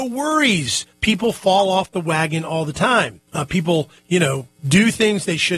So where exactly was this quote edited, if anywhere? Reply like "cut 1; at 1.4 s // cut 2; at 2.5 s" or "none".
cut 1; at 0.9 s // cut 2; at 3.3 s // cut 3; at 4.0 s // cut 4; at 4.6 s